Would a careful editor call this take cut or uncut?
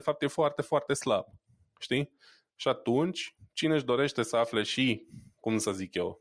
uncut